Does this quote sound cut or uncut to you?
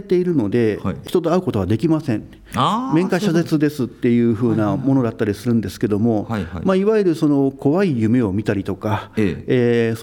uncut